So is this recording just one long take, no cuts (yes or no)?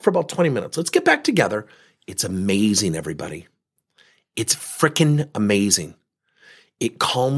yes